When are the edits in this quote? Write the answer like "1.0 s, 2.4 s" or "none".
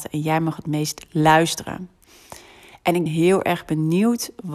3.1 s